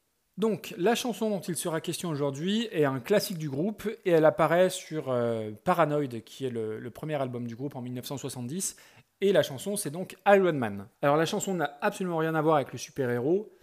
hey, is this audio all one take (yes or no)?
no